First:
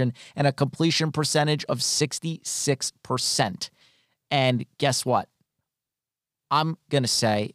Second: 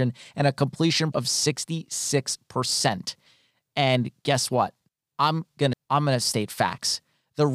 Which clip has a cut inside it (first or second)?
second